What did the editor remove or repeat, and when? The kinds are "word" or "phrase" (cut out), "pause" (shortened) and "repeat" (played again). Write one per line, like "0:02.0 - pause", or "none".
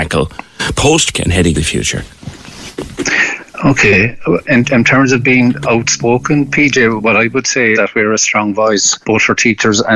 0:01.1 - word
0:01.5 - word
0:04.4 - word
0:07.0 - word
0:07.8 - word
0:09.0 - pause